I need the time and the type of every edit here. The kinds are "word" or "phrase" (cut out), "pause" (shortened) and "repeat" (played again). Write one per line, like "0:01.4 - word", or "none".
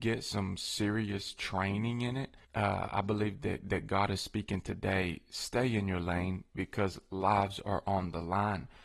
0:02.4 - pause